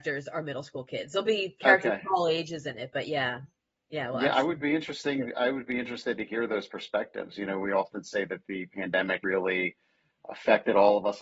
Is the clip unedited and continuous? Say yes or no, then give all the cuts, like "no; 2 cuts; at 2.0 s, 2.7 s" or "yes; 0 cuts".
no; 1 cut; at 9.2 s